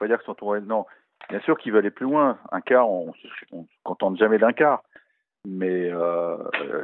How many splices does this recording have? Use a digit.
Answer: 0